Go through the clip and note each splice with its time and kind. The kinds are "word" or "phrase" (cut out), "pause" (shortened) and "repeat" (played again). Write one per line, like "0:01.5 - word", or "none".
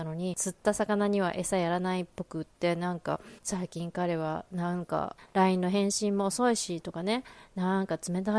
0:03.4 - pause

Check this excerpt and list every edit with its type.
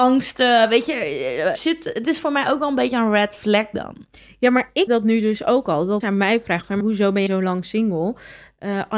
0:01.6 - word
0:04.9 - word
0:06.0 - word
0:06.8 - word
0:07.3 - word

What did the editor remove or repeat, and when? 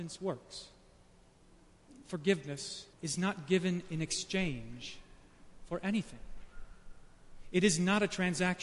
0:02.9 - pause

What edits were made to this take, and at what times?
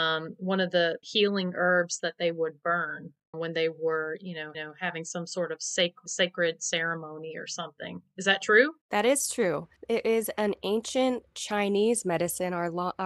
0:01.0 - word
0:03.3 - word
0:04.5 - repeat
0:06.1 - word
0:08.8 - pause
0:09.8 - pause

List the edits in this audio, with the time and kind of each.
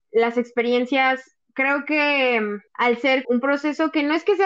0:01.4 - pause
0:02.7 - pause
0:03.2 - word

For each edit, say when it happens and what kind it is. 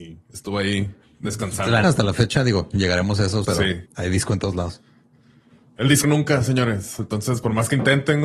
0:01.8 - word
0:03.4 - word
0:03.9 - pause
0:06.0 - phrase

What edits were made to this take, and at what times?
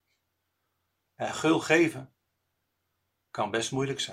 none

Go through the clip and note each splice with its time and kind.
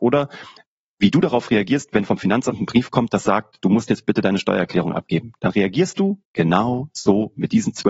none

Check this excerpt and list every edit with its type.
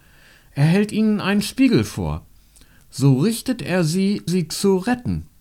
0:04.3 - word

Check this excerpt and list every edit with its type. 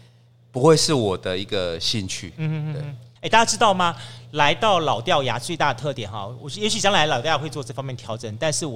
0:03.2 - pause

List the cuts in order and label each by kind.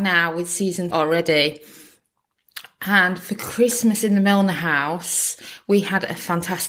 0:00.9 - word

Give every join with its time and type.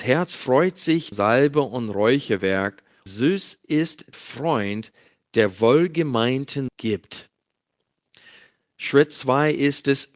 0:01.1 - word
0:03.1 - word
0:04.1 - word
0:06.7 - word

